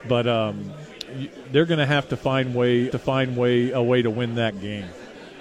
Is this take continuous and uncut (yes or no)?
no